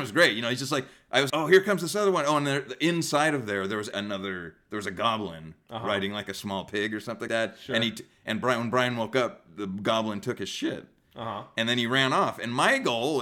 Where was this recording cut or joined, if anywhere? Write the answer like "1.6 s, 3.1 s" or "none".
1.3 s, 3.9 s, 7.3 s